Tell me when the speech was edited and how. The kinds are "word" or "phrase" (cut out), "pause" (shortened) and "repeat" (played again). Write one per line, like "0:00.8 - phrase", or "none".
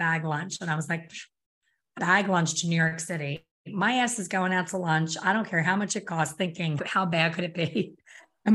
0:02.0 - phrase
0:06.8 - word